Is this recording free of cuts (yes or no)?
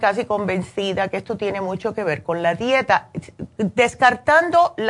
yes